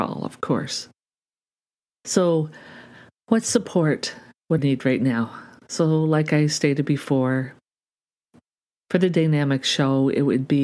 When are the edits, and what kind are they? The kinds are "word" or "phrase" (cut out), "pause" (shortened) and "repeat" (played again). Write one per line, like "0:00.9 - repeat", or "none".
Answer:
0:04.6 - word